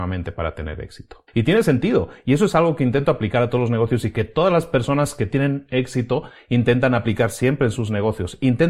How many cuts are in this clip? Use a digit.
1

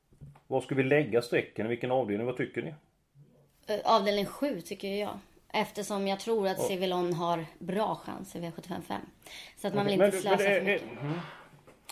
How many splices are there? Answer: 0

